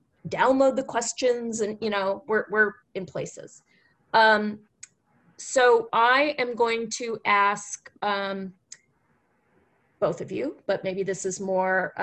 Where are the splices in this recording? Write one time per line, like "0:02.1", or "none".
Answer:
0:05.9